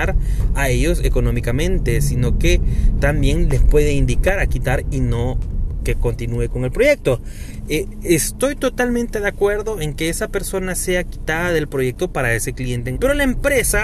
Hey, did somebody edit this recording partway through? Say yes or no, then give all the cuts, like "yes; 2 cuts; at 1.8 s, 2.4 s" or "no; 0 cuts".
yes; 3 cuts; at 4.5 s, 5.8 s, 12.9 s